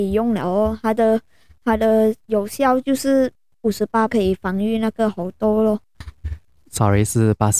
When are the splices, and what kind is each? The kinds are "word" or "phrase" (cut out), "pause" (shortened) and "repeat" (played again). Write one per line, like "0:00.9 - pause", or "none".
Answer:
0:02.2 - pause
0:04.1 - word